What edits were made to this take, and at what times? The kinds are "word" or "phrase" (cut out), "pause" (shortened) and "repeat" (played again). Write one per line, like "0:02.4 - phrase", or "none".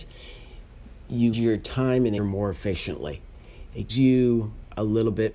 0:01.3 - word
0:02.2 - word
0:03.9 - word

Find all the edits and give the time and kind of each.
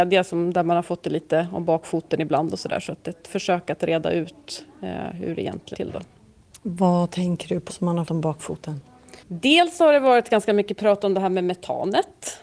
0:05.7 - word
0:07.7 - word
0:08.1 - word
0:09.2 - pause

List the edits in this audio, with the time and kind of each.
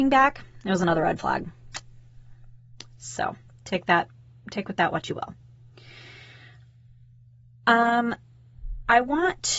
none

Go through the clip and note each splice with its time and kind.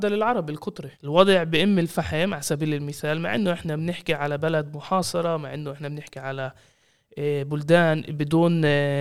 0:00.9 - pause

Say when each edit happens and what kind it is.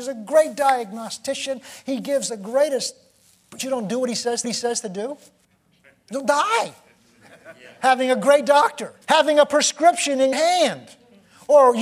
0:03.6 - phrase
0:04.4 - repeat
0:05.4 - pause
0:09.0 - pause
0:10.3 - word

